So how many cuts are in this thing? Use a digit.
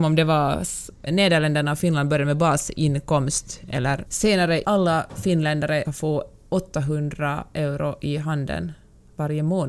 4